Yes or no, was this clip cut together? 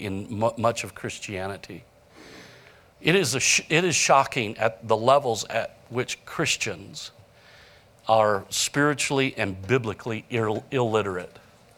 no